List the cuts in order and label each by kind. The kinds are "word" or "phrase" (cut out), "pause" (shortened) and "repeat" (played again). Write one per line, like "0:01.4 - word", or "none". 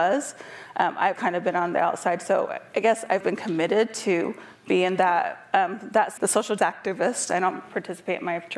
0:01.2 - word
0:03.2 - word
0:06.2 - phrase
0:06.6 - word

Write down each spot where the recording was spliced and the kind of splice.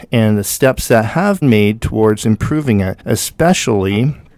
0:01.4 - word
0:03.0 - pause

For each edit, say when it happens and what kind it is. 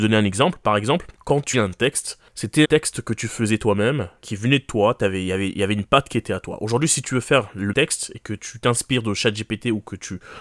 0:01.5 - word
0:02.6 - word
0:04.2 - word
0:07.7 - word

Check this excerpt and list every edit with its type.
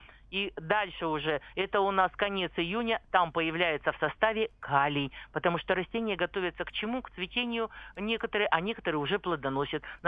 none

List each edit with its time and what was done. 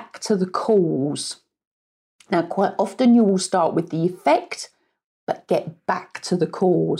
none

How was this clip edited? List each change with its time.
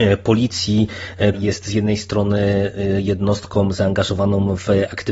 0:01.3 - word

